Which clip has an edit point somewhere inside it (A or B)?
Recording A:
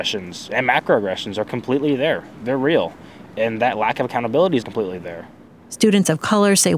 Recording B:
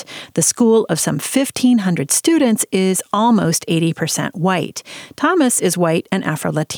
A